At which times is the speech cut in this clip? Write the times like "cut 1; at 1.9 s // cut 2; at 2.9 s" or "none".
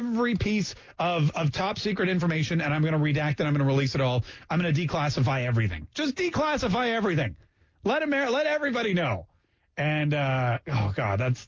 none